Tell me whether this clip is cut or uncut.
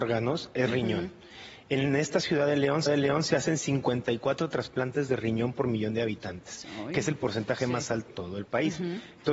cut